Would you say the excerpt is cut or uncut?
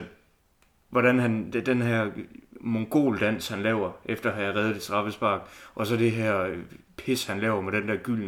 uncut